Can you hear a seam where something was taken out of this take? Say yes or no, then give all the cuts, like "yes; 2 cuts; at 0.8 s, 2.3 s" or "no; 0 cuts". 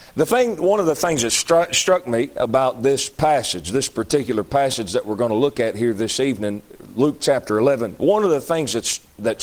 no; 0 cuts